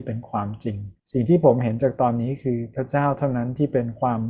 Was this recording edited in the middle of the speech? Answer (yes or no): yes